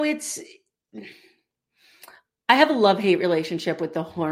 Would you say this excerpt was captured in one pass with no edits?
yes; 0 cuts

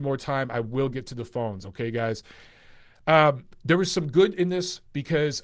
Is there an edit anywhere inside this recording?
no; 0 cuts

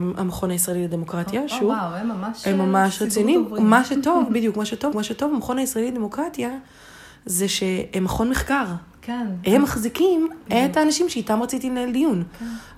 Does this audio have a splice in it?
yes; 1 cut; at 4.9 s

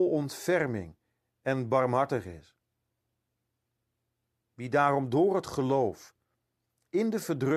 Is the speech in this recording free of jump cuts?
yes; 0 cuts

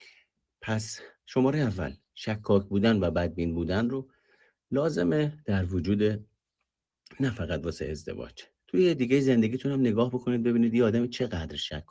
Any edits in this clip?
yes; 2 cuts; at 2.0 s, 9.0 s

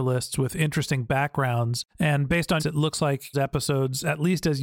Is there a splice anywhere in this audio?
yes; 3 cuts; at 1.9 s, 2.6 s, 3.3 s

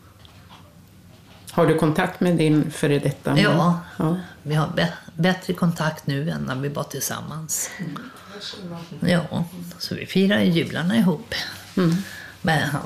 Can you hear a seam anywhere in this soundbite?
no; 0 cuts

